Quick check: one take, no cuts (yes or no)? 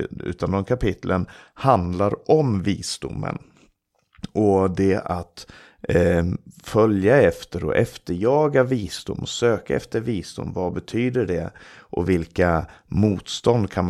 yes